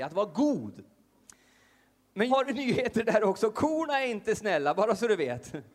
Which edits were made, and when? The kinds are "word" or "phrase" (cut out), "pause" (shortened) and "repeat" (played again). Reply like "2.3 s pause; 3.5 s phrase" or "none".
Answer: 2.3 s word